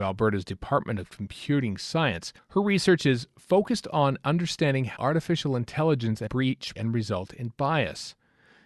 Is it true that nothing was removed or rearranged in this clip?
no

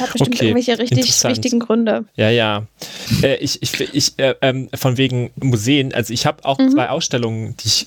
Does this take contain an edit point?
yes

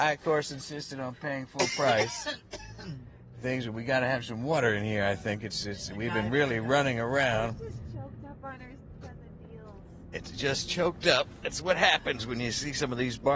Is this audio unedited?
yes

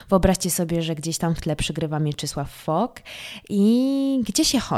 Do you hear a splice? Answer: no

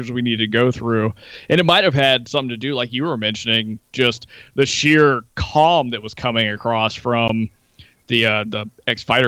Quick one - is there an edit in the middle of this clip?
no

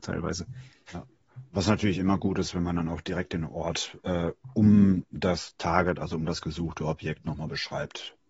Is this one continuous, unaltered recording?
yes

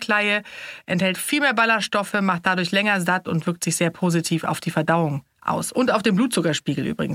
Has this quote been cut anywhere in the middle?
no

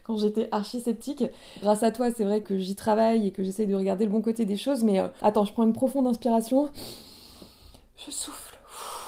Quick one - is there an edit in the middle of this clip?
yes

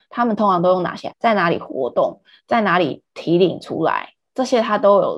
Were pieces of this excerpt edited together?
yes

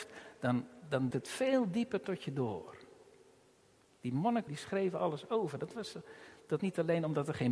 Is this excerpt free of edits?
no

